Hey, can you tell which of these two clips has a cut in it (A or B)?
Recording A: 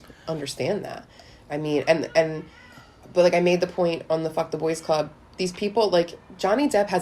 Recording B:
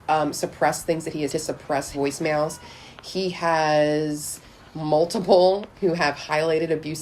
B